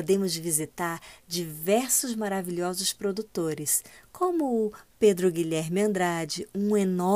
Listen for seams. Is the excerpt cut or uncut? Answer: uncut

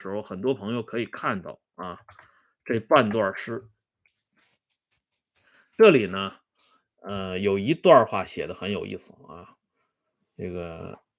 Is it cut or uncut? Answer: uncut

